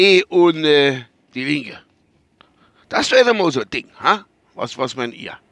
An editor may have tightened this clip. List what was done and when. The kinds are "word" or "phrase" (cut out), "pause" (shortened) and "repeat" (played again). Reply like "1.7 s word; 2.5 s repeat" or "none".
none